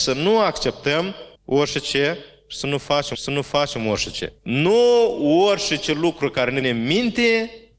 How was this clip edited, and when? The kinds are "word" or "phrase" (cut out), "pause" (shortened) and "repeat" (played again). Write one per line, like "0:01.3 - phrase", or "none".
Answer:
0:01.4 - pause
0:03.1 - repeat
0:04.4 - pause
0:06.6 - word